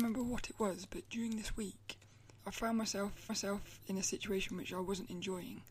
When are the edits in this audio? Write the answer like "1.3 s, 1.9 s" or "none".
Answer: 3.3 s